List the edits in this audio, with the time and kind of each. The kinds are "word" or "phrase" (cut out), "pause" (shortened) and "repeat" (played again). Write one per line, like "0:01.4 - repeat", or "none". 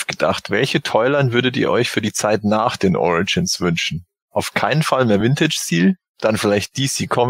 none